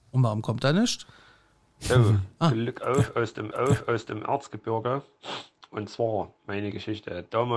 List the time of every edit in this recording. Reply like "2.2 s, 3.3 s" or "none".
3.5 s, 6.4 s